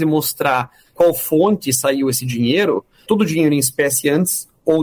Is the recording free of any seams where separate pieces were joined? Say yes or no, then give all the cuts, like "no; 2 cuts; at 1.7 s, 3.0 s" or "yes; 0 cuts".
yes; 0 cuts